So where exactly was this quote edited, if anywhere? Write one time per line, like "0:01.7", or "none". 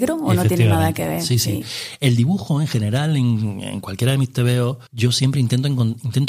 0:04.9